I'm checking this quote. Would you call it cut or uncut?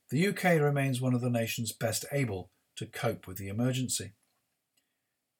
uncut